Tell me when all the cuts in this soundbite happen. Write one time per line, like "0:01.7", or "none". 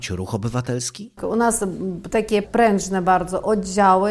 none